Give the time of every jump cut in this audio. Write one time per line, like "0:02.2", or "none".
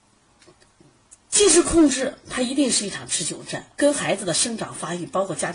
0:03.7